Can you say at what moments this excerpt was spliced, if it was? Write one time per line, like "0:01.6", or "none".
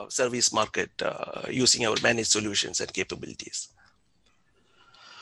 none